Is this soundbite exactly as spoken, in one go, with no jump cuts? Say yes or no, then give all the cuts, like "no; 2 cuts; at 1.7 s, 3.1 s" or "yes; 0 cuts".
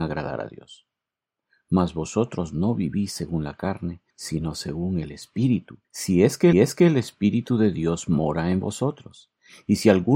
no; 3 cuts; at 4.1 s, 5.8 s, 6.5 s